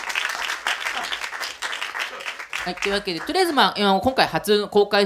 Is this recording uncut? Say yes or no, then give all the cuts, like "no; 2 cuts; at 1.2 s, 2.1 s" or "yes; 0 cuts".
yes; 0 cuts